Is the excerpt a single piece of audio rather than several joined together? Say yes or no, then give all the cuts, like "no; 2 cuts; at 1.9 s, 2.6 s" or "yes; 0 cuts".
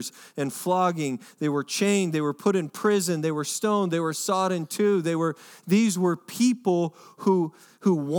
yes; 0 cuts